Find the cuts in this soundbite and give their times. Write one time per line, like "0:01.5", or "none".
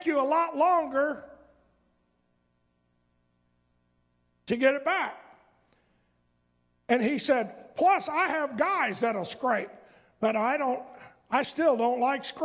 none